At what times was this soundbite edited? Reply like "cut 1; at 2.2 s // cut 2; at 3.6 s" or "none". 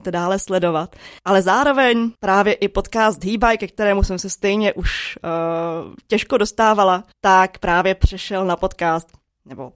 cut 1; at 1.2 s // cut 2; at 2.1 s // cut 3; at 7.1 s